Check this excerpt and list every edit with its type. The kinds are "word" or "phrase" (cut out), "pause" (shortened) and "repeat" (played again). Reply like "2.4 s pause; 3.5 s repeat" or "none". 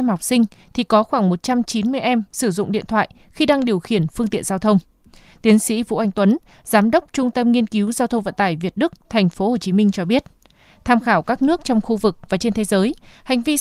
none